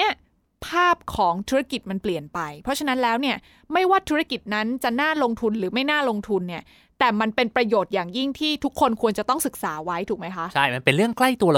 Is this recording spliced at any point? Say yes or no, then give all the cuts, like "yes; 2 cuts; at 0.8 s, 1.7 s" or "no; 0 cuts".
no; 0 cuts